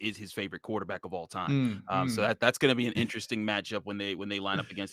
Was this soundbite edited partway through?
no; 0 cuts

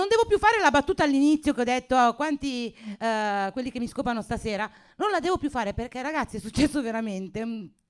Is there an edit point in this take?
no; 0 cuts

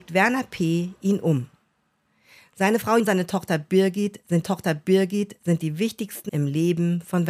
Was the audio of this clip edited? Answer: yes; 3 cuts; at 3.0 s, 4.4 s, 6.3 s

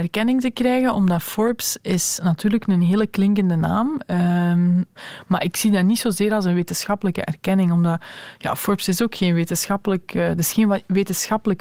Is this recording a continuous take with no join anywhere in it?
yes; 0 cuts

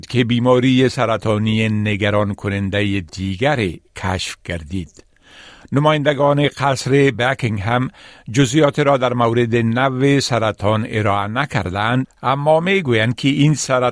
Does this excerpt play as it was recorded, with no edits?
yes; 0 cuts

